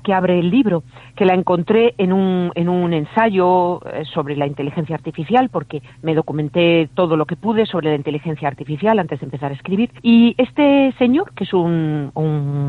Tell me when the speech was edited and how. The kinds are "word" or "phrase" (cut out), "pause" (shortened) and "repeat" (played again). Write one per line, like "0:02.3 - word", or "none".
0:05.9 - pause
0:10.0 - pause